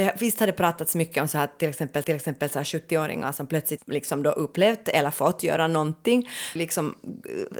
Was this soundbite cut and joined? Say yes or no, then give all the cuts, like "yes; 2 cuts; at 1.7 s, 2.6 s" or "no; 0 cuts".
yes; 3 cuts; at 2.0 s, 3.8 s, 6.6 s